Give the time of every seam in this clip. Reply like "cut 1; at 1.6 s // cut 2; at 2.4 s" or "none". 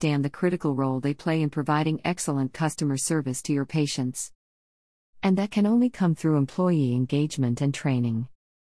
none